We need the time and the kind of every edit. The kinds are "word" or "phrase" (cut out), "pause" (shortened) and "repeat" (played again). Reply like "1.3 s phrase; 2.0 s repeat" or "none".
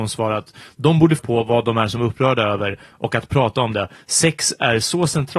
1.2 s word